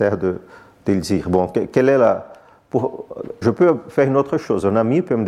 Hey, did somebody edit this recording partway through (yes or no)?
yes